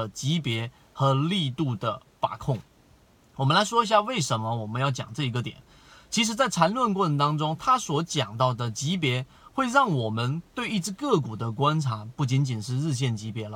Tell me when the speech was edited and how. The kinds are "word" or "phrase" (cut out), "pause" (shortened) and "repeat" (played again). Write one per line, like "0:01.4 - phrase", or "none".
none